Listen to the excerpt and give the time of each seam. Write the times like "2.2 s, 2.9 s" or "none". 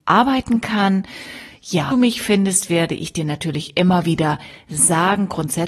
1.9 s